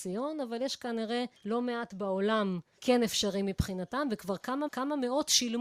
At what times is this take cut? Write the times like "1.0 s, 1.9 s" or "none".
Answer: 1.4 s, 2.8 s, 4.7 s